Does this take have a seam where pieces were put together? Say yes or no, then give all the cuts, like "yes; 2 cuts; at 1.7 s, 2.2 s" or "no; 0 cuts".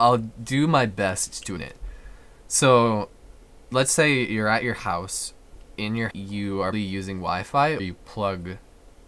yes; 5 cuts; at 1.6 s, 3.7 s, 6.1 s, 6.7 s, 7.8 s